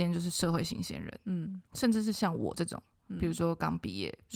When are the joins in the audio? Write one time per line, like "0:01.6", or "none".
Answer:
0:01.7